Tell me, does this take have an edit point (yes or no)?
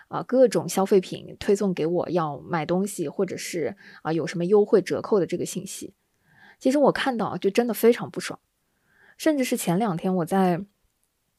no